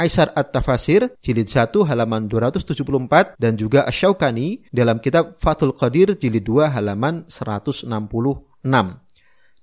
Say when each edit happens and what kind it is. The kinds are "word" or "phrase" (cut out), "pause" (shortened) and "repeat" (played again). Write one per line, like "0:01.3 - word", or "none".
0:01.1 - pause
0:03.3 - pause
0:04.7 - pause